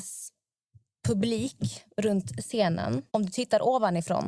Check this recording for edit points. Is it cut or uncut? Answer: cut